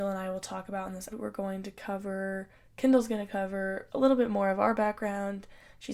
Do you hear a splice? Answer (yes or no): yes